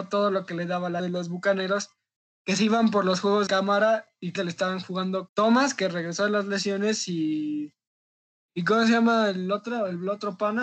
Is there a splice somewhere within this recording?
yes; 4 cuts; at 1.0 s, 3.5 s, 4.4 s, 5.3 s

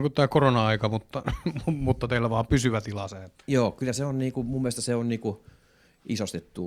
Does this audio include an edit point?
no; 0 cuts

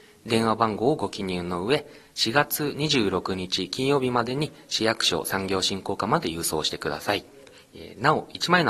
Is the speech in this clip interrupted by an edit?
no; 0 cuts

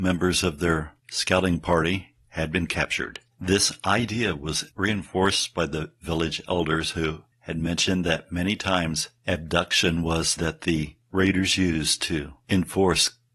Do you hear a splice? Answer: yes; 6 cuts; at 1.0 s, 3.3 s, 4.7 s, 7.3 s, 9.2 s, 10.4 s

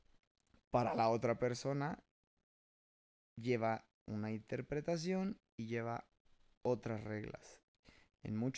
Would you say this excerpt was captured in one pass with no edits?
yes; 0 cuts

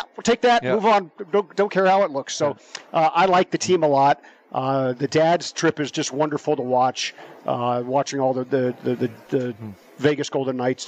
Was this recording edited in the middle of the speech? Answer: no; 0 cuts

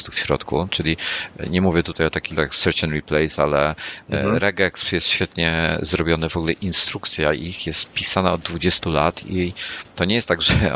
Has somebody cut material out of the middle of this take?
yes; 1 cut; at 2.4 s

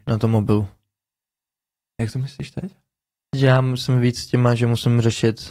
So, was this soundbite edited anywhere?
no; 0 cuts

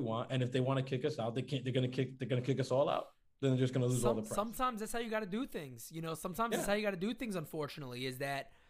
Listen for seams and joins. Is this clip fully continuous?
yes; 0 cuts

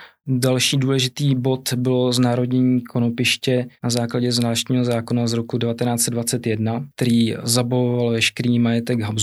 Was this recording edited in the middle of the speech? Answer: yes; 1 cut; at 6.9 s

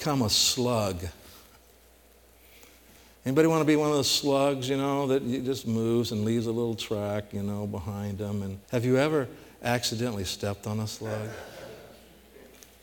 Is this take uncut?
no; 1 cut; at 8.6 s

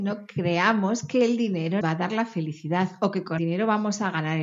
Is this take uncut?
no; 2 cuts; at 1.8 s, 3.4 s

